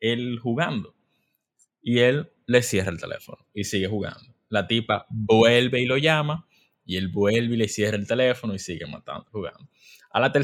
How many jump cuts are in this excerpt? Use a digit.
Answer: 1